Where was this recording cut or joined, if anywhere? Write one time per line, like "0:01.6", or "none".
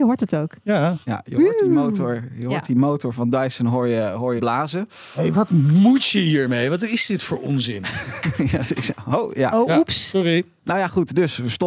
0:01.0
0:04.4
0:05.3

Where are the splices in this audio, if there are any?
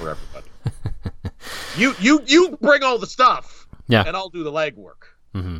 none

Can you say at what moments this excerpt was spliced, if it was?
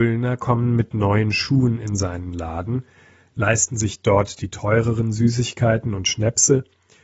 none

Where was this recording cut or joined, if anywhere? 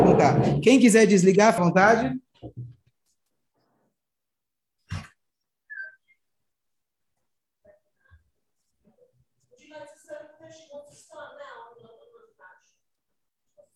0:01.6

